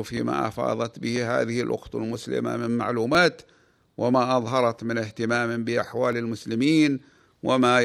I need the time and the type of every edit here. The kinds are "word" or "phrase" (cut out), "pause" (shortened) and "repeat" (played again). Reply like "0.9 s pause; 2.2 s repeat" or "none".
none